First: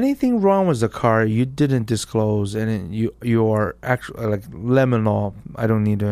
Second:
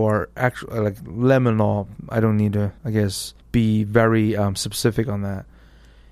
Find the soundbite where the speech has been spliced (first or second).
second